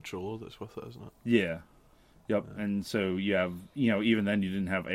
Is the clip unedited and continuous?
no; 1 cut; at 1.9 s

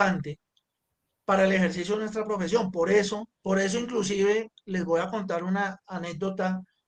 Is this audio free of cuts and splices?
no; 1 cut; at 3.3 s

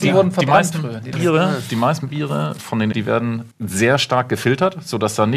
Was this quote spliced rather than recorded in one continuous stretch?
yes; 4 cuts; at 1.1 s, 2.6 s, 2.9 s, 3.5 s

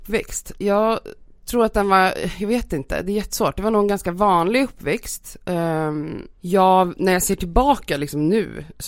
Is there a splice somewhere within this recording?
yes; 1 cut; at 6.3 s

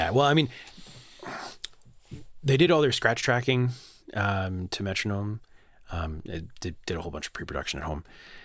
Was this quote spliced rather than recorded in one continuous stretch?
no; 0 cuts

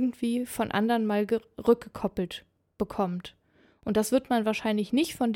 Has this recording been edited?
no; 0 cuts

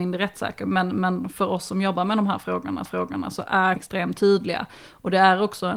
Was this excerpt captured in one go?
no; 2 cuts; at 2.9 s, 3.8 s

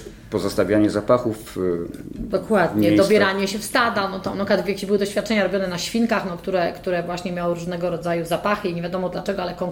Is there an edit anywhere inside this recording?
no; 0 cuts

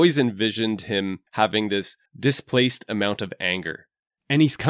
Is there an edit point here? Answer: yes; 2 cuts; at 1.3 s, 2.1 s

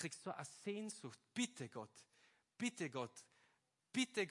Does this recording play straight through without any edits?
yes; 0 cuts

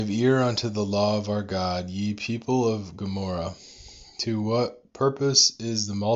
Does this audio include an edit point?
no; 0 cuts

